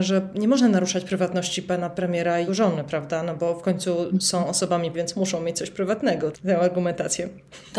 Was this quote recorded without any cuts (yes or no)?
no